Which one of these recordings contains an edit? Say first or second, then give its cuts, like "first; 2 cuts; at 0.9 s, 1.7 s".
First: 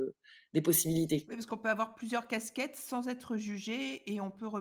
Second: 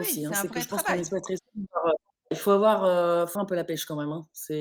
second; 2 cuts; at 2.3 s, 3.3 s